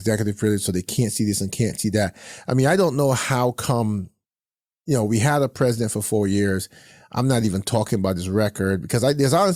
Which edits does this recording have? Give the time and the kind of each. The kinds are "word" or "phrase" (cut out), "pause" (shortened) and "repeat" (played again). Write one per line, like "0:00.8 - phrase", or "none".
none